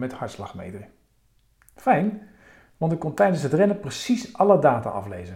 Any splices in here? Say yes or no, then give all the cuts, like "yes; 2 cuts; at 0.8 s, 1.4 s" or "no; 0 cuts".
no; 0 cuts